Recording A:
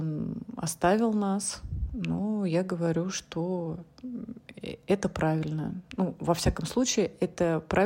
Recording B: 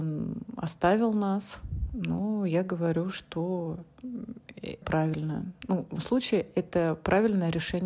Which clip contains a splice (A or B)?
B